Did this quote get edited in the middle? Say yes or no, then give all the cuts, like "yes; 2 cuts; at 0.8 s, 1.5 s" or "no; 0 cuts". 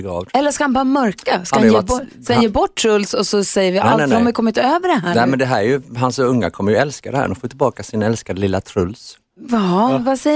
no; 0 cuts